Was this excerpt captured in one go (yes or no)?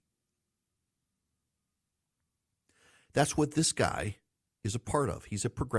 yes